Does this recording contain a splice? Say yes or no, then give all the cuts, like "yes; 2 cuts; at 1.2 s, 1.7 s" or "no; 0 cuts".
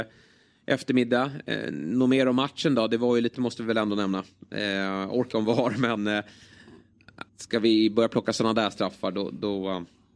yes; 4 cuts; at 3.3 s, 5.3 s, 6.0 s, 7.3 s